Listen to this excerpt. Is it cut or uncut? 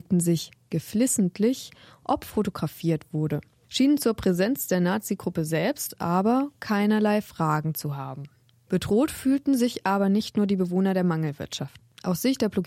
uncut